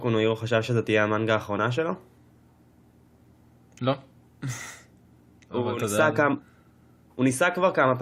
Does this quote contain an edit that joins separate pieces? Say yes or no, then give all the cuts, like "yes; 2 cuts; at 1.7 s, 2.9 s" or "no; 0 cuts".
no; 0 cuts